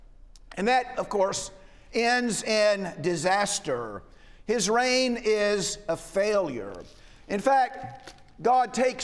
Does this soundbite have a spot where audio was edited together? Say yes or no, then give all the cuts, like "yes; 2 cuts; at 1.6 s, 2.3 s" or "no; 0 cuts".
no; 0 cuts